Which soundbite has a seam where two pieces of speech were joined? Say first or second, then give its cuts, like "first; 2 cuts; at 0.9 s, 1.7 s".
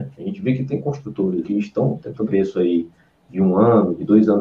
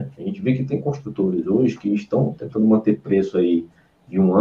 first; 2 cuts; at 1.4 s, 2.2 s